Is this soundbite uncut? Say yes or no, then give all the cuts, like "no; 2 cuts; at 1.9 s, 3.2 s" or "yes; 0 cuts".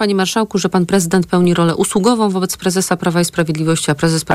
yes; 0 cuts